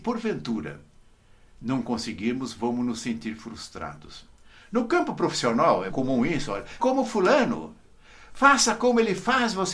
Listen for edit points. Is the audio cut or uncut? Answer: cut